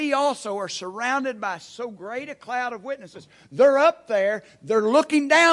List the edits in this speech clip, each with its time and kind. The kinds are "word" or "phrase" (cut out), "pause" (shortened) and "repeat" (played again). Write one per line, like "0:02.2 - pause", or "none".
none